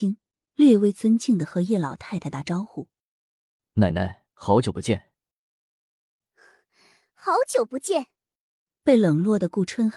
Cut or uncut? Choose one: cut